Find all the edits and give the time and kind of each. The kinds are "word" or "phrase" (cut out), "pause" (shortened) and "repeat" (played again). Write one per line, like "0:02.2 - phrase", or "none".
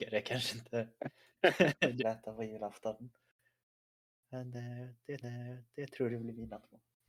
0:02.0 - phrase
0:05.2 - repeat